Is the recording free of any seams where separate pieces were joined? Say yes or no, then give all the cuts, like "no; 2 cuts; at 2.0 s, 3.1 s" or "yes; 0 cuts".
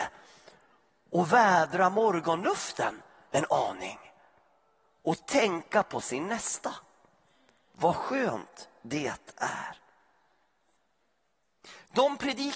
yes; 0 cuts